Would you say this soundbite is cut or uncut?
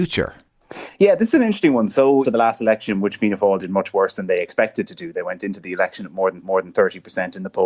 cut